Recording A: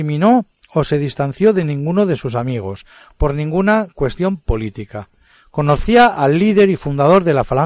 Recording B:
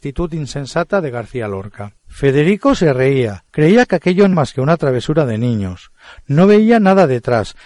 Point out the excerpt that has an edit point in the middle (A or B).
B